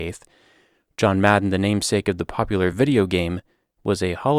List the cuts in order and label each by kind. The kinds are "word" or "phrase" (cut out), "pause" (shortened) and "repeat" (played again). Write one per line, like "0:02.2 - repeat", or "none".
none